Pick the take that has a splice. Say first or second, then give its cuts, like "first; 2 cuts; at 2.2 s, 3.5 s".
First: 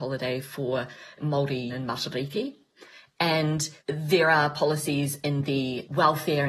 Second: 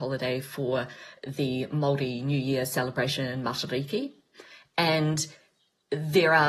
first; 3 cuts; at 1.2 s, 1.7 s, 3.8 s